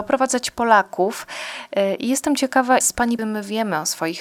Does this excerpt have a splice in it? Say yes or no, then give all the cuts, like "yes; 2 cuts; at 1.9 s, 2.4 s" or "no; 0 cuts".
yes; 2 cuts; at 2.8 s, 3.2 s